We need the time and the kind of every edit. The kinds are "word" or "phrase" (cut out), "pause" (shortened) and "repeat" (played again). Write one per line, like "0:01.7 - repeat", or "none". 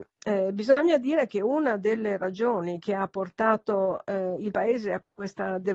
none